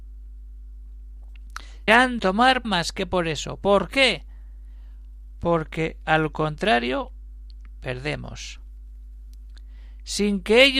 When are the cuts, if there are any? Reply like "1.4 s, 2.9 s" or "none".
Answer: 1.9 s, 2.2 s, 2.6 s